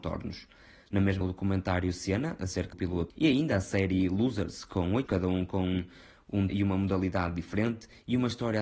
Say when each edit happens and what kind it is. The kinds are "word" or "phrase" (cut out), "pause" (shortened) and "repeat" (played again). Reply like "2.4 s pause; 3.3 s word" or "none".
1.2 s word; 2.7 s word; 3.1 s word; 5.1 s word; 6.5 s word